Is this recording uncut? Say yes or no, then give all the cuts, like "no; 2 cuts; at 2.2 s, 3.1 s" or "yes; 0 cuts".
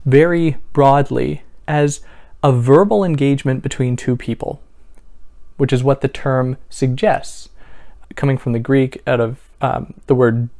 no; 2 cuts; at 1.6 s, 8.0 s